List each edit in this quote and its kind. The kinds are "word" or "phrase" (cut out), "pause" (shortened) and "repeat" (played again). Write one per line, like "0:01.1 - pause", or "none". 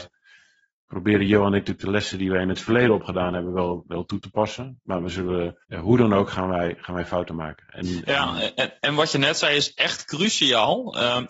0:05.6 - pause